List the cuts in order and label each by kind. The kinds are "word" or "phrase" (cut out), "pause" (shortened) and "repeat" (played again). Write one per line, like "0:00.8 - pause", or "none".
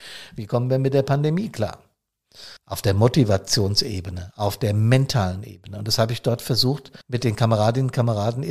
0:02.6 - pause
0:07.0 - pause